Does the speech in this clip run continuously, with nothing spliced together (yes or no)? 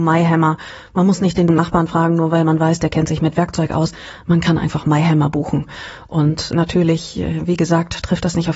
yes